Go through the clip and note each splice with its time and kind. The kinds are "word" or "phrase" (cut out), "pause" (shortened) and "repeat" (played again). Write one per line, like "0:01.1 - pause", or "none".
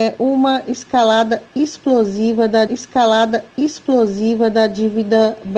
0:02.7 - repeat